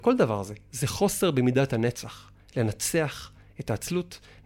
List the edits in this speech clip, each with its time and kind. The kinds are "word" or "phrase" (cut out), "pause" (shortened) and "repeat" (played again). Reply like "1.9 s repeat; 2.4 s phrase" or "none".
none